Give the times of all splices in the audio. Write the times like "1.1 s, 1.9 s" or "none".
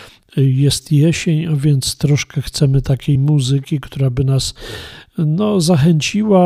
3.2 s